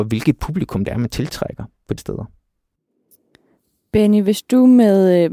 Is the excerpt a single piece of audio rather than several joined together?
no; 1 cut; at 2.0 s

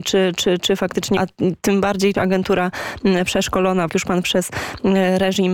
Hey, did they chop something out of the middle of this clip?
yes; 4 cuts; at 1.2 s, 2.1 s, 3.9 s, 4.2 s

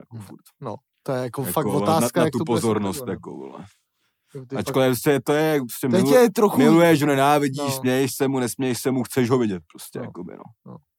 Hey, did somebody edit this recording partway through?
no; 0 cuts

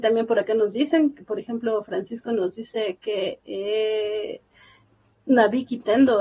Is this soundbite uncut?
yes; 0 cuts

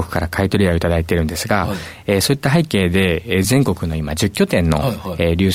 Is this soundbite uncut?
yes; 0 cuts

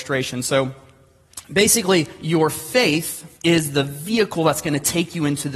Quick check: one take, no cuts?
no; 1 cut; at 3.3 s

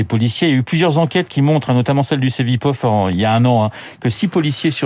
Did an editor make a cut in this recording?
no; 0 cuts

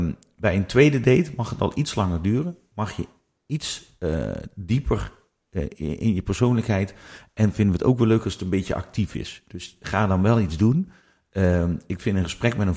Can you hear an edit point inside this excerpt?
no; 0 cuts

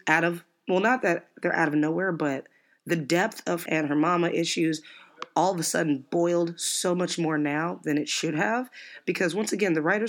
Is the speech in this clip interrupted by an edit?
yes; 1 cut; at 3.7 s

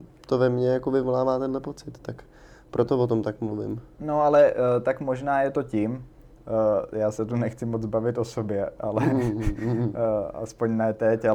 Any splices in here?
no; 0 cuts

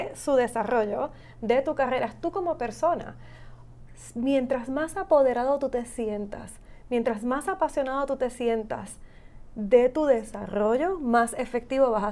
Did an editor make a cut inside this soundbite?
no; 0 cuts

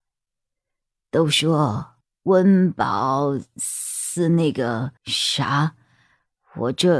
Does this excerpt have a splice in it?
yes; 2 cuts; at 2.0 s, 5.0 s

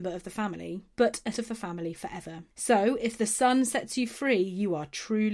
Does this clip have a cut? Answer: yes; 3 cuts; at 0.9 s, 1.3 s, 2.5 s

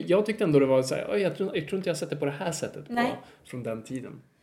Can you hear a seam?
no; 0 cuts

